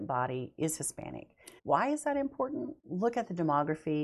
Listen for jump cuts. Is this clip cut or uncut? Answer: cut